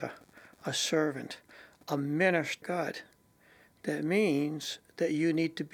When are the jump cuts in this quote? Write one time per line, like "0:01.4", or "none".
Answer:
0:02.6